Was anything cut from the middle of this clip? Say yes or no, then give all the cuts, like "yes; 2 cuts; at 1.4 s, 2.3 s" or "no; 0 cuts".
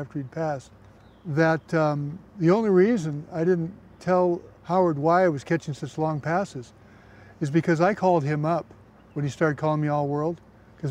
yes; 3 cuts; at 0.9 s, 2.3 s, 4.5 s